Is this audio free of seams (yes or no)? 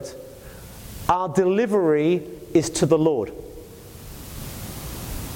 yes